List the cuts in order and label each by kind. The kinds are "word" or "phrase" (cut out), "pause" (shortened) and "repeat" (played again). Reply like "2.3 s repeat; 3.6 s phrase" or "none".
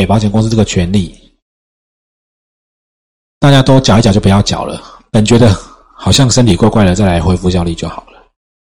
none